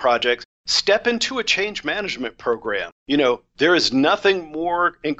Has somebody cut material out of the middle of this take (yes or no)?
yes